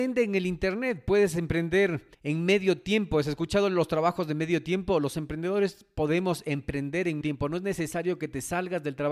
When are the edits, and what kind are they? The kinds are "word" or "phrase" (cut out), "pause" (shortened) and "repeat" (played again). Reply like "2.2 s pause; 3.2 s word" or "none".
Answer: 2.1 s pause; 7.2 s word